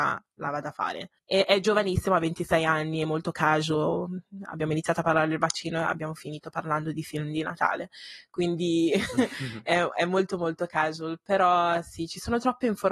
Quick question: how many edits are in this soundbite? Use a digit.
1